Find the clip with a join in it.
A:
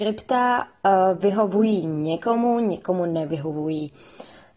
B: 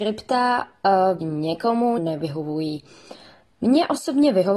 B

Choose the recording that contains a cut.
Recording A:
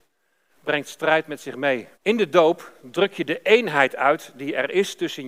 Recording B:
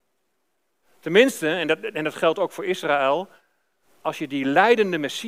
A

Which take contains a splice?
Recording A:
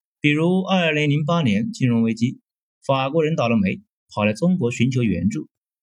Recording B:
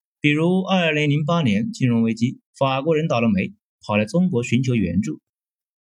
B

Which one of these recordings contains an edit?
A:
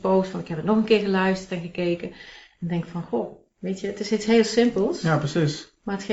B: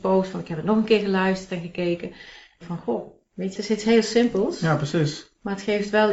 B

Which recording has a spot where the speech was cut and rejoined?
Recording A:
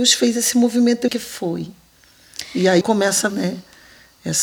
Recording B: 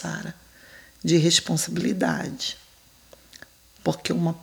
A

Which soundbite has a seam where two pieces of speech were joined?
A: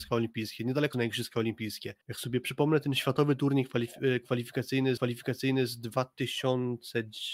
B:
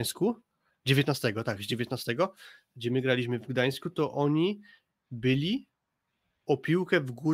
A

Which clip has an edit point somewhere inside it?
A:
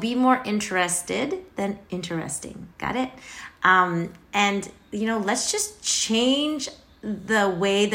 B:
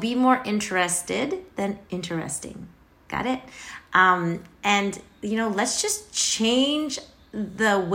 A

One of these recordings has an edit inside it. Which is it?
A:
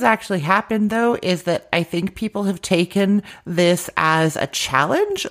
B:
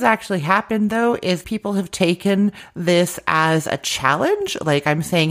B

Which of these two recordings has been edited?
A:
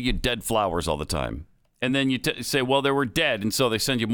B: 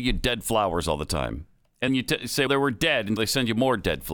B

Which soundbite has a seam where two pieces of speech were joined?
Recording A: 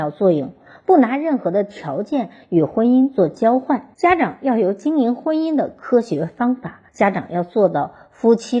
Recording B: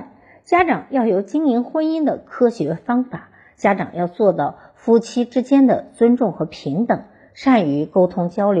A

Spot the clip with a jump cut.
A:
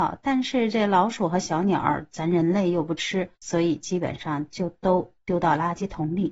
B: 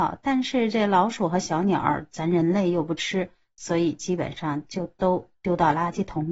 A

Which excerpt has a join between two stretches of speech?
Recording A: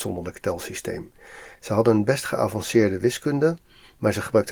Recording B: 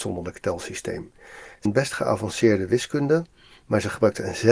B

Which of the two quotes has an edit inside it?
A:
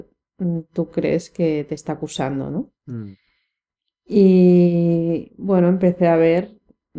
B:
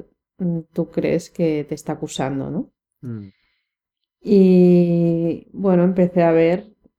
A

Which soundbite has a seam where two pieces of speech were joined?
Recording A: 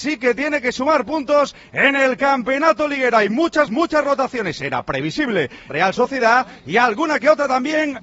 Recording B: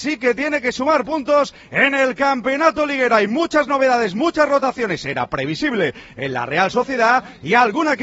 A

